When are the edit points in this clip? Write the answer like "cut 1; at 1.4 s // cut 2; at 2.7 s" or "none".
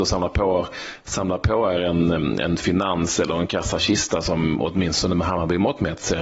none